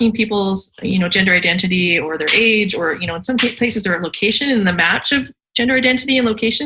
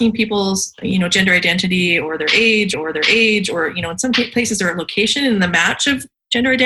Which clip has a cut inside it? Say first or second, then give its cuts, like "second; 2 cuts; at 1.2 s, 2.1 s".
second; 1 cut; at 2.7 s